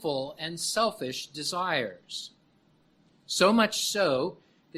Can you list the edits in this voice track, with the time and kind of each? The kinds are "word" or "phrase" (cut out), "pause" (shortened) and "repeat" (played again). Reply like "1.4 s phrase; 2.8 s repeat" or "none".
none